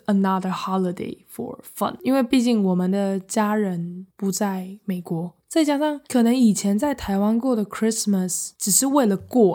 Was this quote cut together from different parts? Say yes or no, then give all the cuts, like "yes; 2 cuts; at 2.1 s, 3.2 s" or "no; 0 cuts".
yes; 2 cuts; at 6.0 s, 8.5 s